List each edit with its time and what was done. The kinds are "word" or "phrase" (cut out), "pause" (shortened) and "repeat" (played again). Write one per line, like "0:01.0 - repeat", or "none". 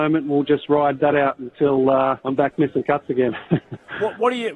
0:02.2 - pause